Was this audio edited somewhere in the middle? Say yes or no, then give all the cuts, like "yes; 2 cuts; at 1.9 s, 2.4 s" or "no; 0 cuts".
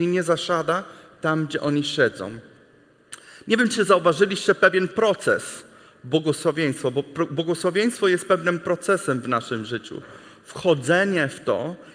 no; 0 cuts